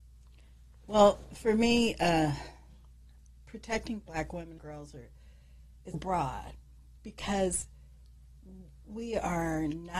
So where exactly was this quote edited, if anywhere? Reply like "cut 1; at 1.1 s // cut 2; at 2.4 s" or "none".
cut 1; at 4.6 s // cut 2; at 5.9 s